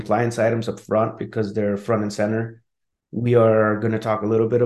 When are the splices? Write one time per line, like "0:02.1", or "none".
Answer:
none